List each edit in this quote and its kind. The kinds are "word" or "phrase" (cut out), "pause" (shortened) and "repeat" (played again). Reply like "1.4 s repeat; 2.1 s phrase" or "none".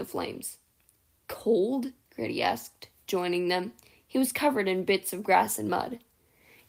none